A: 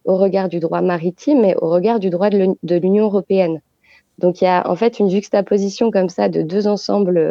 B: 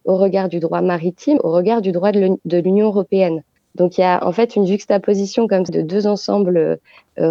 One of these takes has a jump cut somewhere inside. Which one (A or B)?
B